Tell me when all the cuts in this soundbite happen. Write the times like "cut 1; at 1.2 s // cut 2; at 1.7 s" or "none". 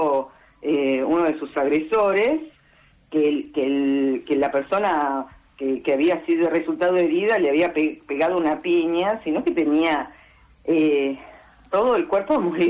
none